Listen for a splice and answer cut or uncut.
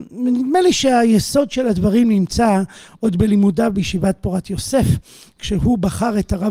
uncut